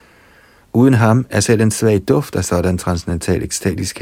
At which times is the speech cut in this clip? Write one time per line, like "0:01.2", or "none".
none